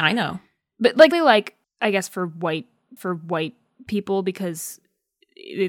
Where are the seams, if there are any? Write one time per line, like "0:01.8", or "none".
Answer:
0:01.1
0:01.6
0:03.0

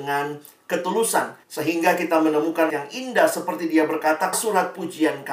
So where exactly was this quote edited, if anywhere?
0:01.4
0:02.7
0:04.3

